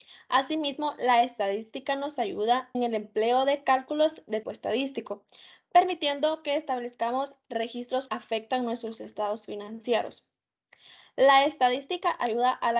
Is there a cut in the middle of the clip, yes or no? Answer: yes